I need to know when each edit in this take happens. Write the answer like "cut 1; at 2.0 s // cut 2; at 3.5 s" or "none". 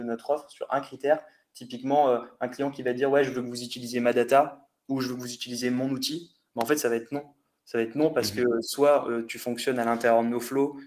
none